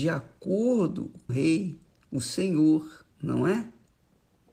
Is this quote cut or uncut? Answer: cut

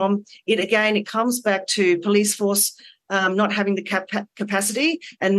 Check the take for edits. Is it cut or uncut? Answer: uncut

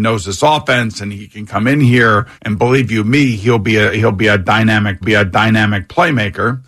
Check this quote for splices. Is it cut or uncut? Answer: cut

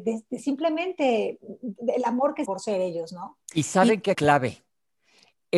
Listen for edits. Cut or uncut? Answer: cut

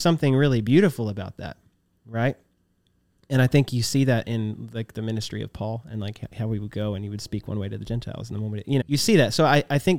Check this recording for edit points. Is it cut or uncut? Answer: cut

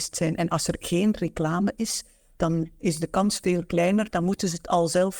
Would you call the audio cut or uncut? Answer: uncut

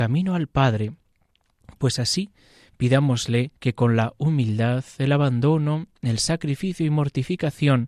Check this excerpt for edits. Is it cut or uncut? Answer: cut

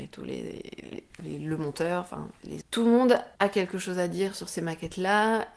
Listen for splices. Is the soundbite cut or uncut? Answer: cut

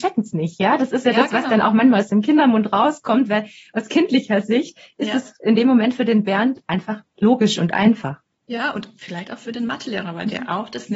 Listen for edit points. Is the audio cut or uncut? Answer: uncut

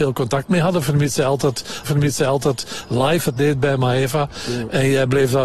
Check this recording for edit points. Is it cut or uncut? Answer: cut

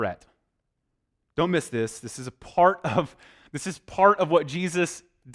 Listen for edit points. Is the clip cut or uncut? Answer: uncut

